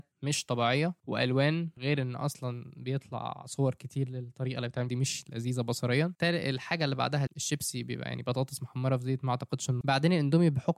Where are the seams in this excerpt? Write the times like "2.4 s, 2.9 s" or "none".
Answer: 4.9 s, 7.3 s, 9.8 s